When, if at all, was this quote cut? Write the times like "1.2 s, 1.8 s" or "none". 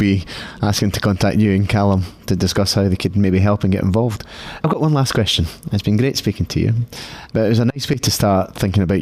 none